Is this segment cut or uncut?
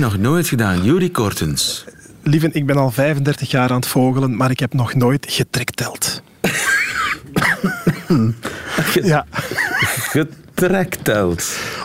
uncut